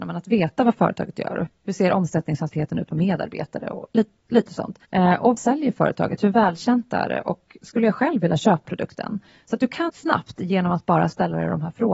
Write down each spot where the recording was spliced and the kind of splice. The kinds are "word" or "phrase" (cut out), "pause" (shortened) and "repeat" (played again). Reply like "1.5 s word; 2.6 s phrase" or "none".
1.5 s word; 4.8 s pause; 5.4 s word; 8.6 s phrase; 9.9 s phrase